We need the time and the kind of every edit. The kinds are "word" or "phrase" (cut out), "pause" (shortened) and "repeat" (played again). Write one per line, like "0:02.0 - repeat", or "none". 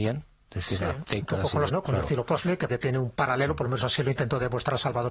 0:01.7 - word
0:02.7 - word